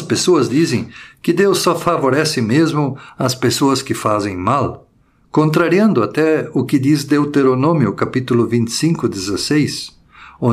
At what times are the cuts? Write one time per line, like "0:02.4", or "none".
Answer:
none